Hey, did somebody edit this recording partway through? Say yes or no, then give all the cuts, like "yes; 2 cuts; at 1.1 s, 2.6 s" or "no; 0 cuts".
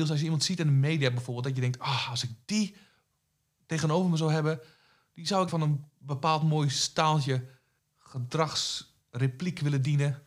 yes; 1 cut; at 5.5 s